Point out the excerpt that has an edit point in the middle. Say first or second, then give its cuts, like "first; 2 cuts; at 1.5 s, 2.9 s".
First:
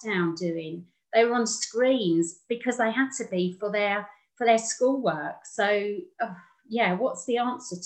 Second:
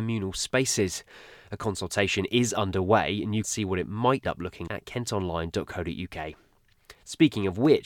second; 3 cuts; at 3.4 s, 4.2 s, 4.7 s